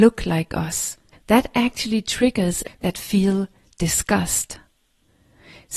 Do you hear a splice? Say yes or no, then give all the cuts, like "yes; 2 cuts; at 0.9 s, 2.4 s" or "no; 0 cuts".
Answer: yes; 2 cuts; at 1.1 s, 2.7 s